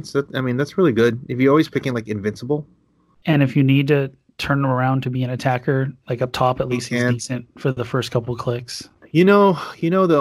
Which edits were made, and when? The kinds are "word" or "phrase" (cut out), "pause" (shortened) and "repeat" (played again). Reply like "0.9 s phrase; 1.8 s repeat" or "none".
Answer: none